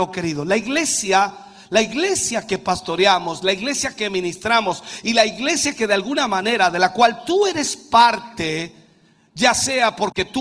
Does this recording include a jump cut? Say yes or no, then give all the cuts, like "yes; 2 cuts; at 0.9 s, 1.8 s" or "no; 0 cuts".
no; 0 cuts